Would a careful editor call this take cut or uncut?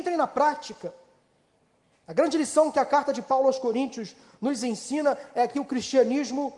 uncut